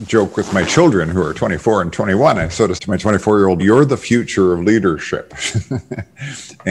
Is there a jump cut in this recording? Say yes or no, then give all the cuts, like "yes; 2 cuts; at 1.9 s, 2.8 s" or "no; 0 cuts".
yes; 2 cuts; at 2.8 s, 3.6 s